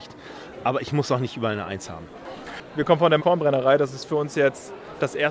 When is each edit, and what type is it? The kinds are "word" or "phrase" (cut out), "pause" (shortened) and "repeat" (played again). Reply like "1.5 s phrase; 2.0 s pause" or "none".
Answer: 3.2 s word